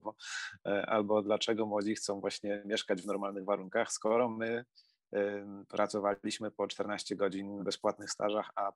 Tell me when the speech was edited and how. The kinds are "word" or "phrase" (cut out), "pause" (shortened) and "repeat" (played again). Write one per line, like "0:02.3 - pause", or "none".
0:07.6 - word